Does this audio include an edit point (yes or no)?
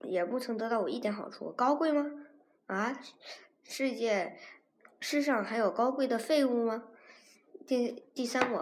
no